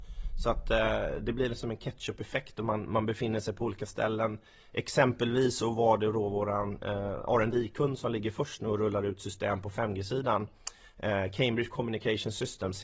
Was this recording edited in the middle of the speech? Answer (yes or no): no